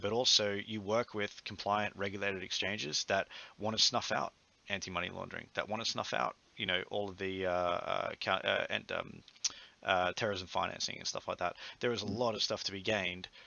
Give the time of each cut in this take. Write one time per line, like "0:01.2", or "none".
none